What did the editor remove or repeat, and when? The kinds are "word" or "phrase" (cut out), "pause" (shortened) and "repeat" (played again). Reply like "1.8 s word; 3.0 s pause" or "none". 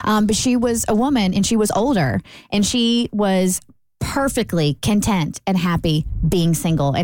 none